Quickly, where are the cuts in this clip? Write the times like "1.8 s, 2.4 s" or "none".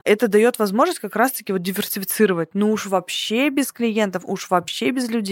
none